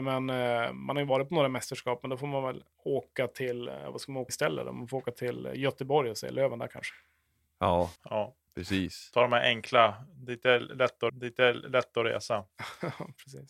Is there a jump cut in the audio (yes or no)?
yes